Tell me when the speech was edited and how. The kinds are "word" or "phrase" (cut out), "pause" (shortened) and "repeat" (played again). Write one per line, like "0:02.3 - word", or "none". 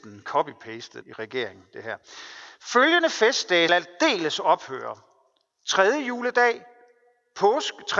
0:01.0 - word
0:03.7 - word